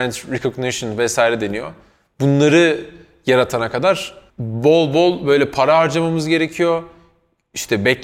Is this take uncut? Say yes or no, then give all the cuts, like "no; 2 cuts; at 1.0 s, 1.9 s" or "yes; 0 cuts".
yes; 0 cuts